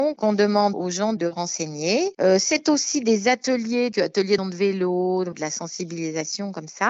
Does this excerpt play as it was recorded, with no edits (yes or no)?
no